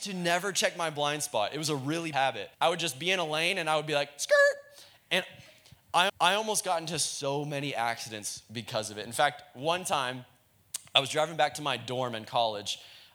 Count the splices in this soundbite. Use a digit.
3